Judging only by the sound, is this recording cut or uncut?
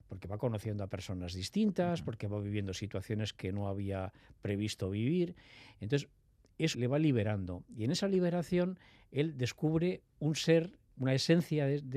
cut